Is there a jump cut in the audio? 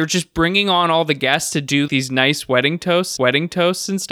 yes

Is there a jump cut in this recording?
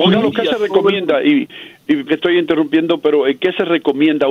yes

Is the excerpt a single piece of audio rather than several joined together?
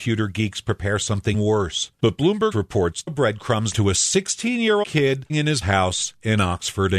no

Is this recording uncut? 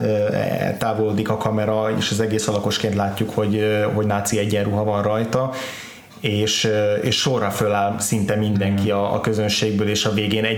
yes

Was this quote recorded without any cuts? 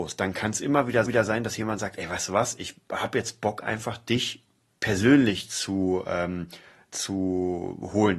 no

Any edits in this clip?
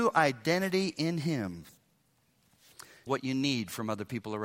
yes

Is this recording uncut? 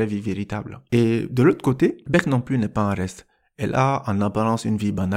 yes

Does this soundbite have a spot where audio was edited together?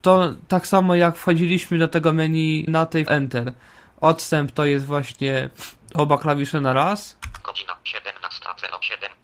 yes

